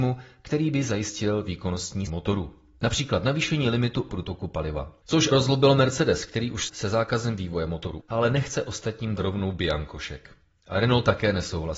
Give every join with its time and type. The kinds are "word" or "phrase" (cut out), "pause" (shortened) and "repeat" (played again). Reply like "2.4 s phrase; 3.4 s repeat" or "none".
2.1 s word; 4.1 s word; 5.3 s word; 6.7 s word; 8.0 s word; 9.2 s word